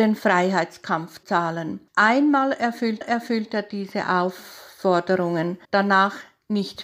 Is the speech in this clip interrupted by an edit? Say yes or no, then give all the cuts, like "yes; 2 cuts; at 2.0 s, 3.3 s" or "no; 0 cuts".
yes; 4 cuts; at 1.2 s, 1.9 s, 3.0 s, 5.6 s